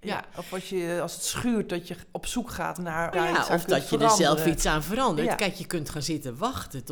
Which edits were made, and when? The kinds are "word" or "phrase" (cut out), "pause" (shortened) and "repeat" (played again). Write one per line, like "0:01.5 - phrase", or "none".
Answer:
0:03.1 - phrase